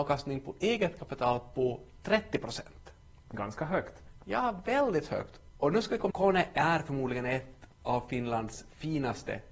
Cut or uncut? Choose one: cut